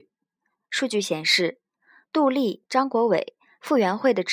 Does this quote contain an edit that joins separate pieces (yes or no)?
no